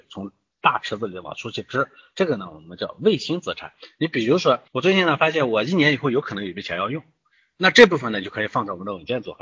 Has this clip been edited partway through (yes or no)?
yes